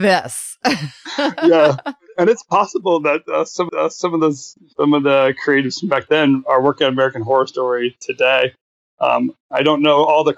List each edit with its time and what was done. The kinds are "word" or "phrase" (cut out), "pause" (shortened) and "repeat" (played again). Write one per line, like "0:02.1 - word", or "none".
0:03.7 - repeat